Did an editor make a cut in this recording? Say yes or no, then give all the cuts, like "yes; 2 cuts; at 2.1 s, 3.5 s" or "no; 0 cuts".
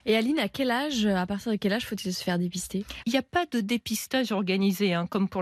yes; 1 cut; at 3.0 s